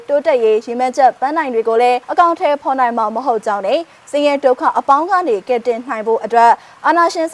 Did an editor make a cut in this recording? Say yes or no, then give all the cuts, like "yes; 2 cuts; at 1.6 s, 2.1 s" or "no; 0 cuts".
yes; 1 cut; at 2.0 s